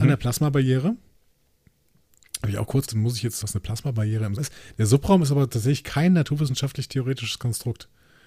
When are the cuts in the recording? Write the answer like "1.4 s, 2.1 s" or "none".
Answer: 2.9 s, 3.4 s, 4.4 s